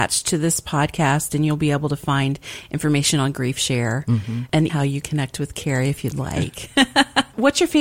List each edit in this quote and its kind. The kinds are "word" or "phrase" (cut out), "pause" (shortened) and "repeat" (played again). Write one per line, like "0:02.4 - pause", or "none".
0:04.7 - word
0:05.0 - word